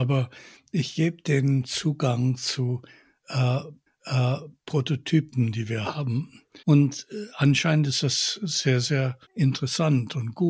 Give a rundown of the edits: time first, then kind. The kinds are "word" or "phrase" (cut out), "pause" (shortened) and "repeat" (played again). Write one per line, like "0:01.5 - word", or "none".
0:03.9 - repeat
0:06.6 - pause
0:09.2 - pause